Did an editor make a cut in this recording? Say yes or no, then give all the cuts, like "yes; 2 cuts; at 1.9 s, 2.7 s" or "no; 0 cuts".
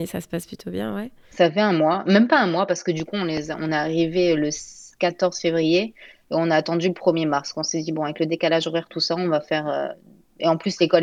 no; 0 cuts